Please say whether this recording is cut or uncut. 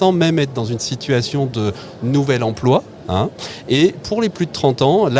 uncut